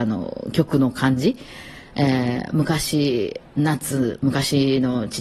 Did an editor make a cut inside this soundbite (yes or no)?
yes